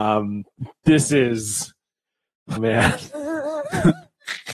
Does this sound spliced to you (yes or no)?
yes